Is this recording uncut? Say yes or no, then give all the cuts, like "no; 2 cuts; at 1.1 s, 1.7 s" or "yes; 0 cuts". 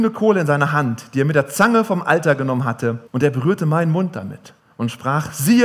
no; 2 cuts; at 3.1 s, 4.6 s